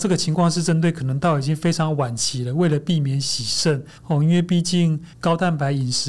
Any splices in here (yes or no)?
yes